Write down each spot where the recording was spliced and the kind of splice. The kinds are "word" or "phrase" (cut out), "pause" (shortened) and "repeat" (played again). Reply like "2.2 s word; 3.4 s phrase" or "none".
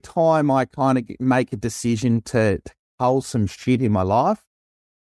none